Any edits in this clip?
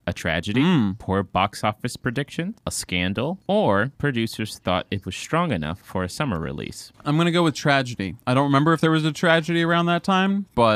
no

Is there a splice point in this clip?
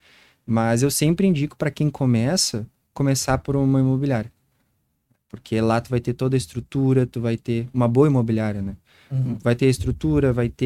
yes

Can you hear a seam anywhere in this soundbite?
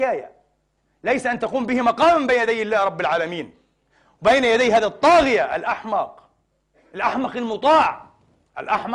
no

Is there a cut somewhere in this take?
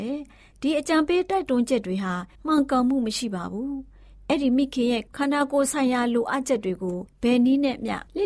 yes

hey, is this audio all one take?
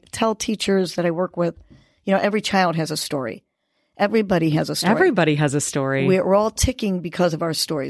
yes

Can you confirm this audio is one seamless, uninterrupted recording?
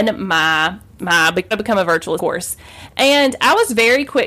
no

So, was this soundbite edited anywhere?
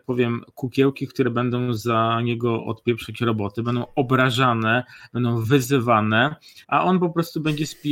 yes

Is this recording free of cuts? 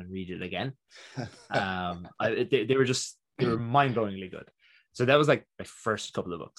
yes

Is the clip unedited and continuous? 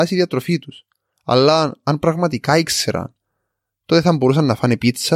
yes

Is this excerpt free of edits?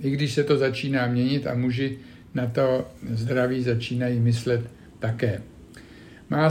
yes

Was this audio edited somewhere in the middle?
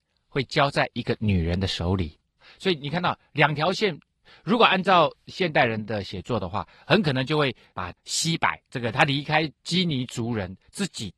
yes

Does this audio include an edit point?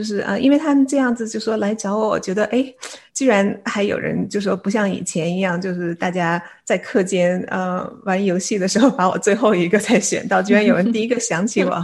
yes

